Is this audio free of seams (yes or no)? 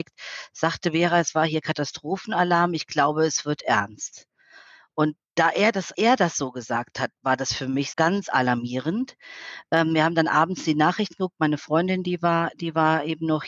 no